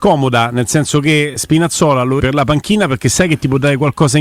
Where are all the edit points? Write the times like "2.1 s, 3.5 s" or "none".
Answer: 2.2 s